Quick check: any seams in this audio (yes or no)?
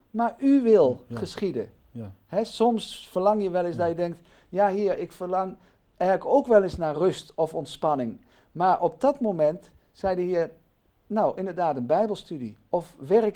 no